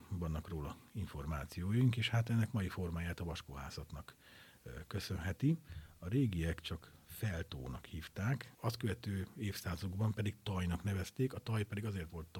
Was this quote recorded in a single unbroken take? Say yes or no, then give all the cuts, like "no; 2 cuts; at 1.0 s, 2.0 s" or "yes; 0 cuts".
no; 1 cut; at 8.5 s